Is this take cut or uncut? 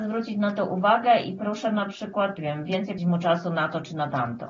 cut